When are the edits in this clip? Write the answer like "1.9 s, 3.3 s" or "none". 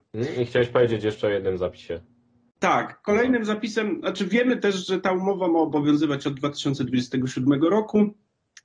none